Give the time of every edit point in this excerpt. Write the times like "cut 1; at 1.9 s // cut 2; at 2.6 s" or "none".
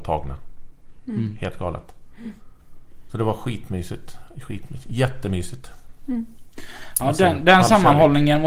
none